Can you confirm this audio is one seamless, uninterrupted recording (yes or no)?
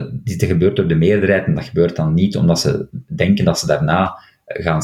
yes